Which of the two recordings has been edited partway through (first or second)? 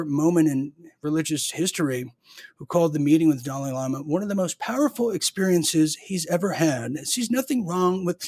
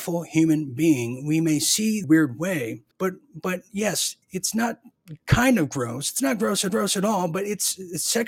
second